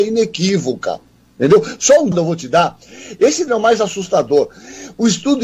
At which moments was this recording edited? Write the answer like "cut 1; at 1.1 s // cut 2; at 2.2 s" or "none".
cut 1; at 2.1 s // cut 2; at 3.5 s